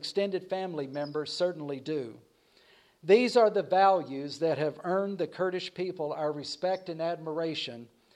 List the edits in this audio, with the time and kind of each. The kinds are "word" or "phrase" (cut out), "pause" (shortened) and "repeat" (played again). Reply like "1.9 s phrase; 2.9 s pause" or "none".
none